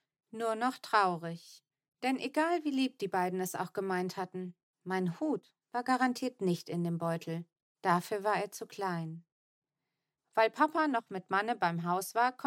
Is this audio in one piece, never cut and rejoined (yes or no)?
yes